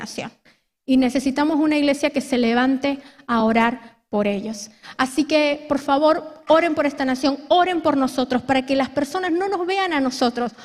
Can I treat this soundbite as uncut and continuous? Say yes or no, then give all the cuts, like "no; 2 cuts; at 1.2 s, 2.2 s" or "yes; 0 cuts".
yes; 0 cuts